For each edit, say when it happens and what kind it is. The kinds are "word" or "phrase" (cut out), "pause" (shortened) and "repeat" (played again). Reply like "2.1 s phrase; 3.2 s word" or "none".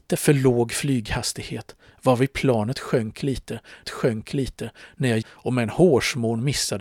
3.8 s repeat; 5.2 s word

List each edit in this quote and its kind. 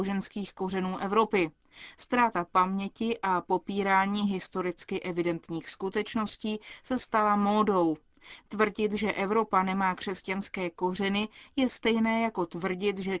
none

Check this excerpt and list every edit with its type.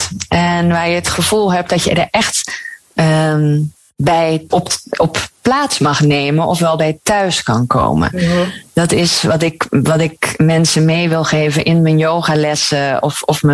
4.5 s word

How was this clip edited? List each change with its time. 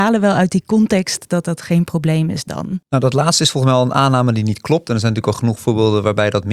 2.8 s pause

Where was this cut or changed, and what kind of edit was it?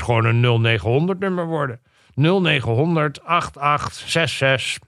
none

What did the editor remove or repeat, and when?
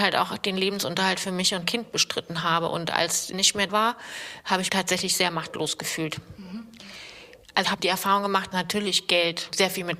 1.6 s word; 3.3 s word; 3.7 s word; 4.7 s word; 7.6 s word; 8.5 s word

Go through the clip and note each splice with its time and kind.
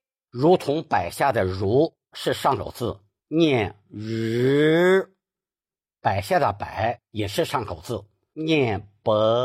none

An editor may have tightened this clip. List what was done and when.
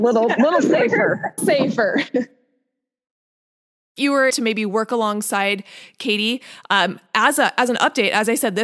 1.4 s phrase; 4.0 s phrase; 4.3 s word

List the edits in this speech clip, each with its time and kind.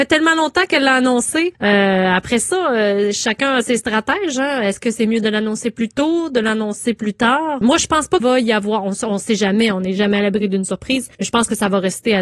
8.2 s word; 11.1 s pause

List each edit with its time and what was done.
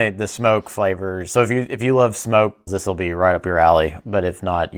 2.7 s word

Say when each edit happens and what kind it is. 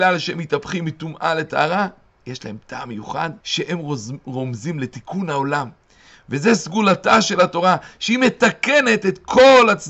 3.4 s pause

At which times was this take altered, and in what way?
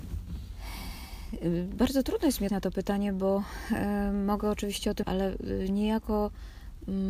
2.5 s word; 5.0 s word

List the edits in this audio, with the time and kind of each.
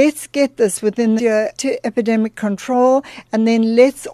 1.2 s word; 1.6 s word

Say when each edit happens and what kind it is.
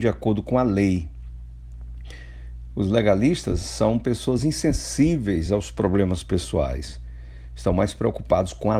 none

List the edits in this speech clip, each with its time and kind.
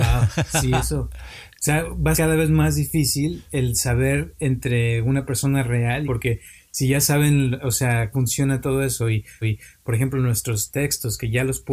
2.1 s word; 6.0 s phrase; 8.1 s word; 9.4 s repeat

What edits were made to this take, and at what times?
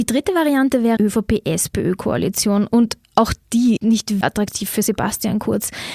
1.0 s word; 3.8 s word; 4.2 s word

